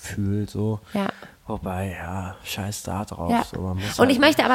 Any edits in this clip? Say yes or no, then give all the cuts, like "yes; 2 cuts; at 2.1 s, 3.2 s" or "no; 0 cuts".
no; 0 cuts